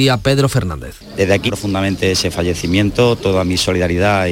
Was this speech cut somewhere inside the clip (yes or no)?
yes